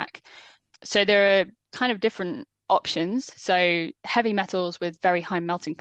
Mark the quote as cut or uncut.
uncut